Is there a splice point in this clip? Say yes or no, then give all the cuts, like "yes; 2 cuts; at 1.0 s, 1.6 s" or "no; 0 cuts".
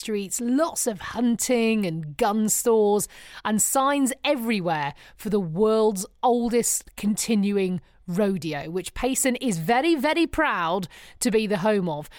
no; 0 cuts